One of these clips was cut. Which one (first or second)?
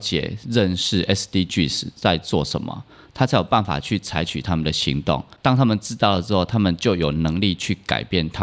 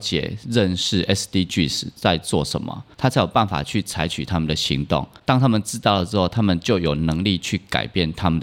second